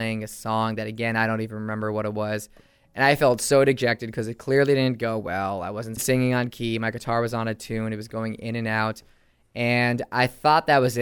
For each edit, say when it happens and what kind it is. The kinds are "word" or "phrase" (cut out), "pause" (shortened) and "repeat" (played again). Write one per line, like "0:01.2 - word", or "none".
none